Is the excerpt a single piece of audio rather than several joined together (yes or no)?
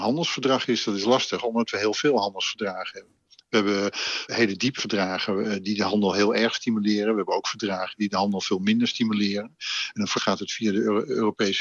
no